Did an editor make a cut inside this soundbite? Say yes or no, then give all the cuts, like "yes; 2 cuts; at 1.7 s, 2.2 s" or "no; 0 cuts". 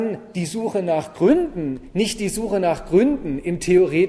no; 0 cuts